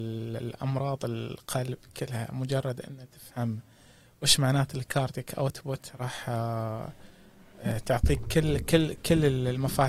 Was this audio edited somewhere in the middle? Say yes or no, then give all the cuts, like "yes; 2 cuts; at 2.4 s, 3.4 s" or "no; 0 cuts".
no; 0 cuts